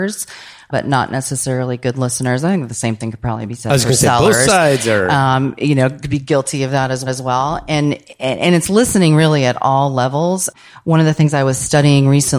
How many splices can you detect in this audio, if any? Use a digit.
1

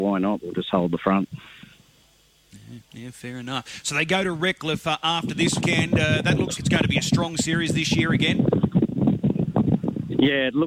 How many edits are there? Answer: 3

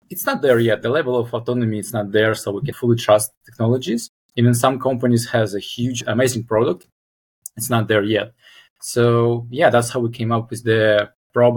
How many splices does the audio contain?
1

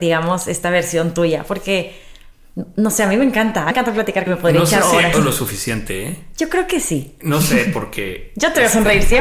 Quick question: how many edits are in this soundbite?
3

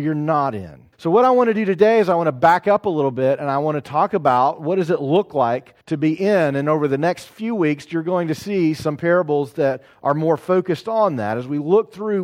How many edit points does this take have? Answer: 2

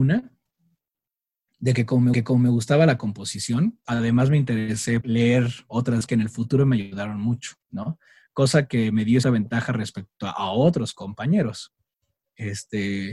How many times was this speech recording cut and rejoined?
6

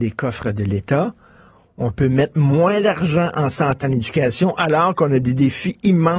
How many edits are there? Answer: 1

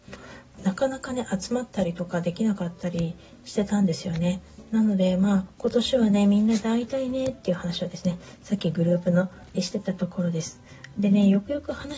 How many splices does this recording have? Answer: 1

